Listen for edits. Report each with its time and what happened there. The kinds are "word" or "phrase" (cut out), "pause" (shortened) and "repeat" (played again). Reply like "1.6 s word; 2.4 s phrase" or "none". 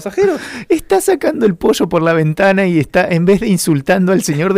none